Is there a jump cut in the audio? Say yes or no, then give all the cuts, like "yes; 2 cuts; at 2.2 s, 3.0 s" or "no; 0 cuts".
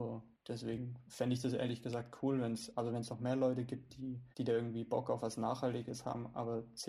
yes; 1 cut; at 4.3 s